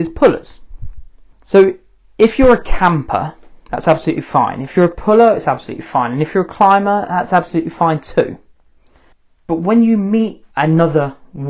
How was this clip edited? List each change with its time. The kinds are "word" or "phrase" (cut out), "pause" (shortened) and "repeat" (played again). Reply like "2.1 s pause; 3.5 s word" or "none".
1.3 s pause; 9.1 s pause; 10.5 s pause